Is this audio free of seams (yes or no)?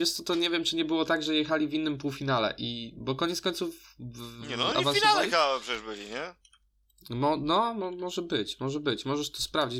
yes